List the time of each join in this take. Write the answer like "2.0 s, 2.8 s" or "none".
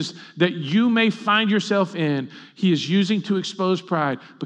none